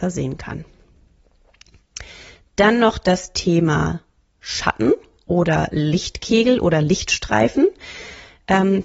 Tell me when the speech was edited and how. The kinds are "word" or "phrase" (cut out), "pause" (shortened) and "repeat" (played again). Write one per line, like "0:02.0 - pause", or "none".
none